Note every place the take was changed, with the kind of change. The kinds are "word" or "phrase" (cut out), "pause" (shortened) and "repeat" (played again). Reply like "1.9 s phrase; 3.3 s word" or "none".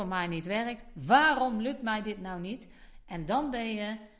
none